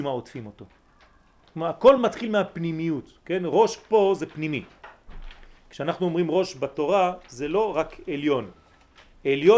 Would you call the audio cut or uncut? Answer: uncut